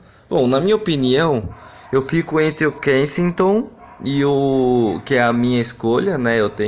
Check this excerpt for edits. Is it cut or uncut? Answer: uncut